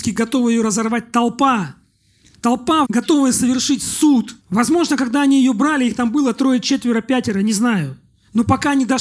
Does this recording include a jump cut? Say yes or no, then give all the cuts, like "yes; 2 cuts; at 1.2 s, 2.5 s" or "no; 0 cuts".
yes; 2 cuts; at 2.8 s, 4.4 s